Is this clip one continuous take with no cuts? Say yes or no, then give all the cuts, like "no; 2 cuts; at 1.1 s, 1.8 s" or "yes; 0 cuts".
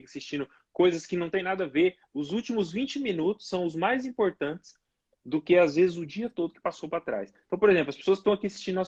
yes; 0 cuts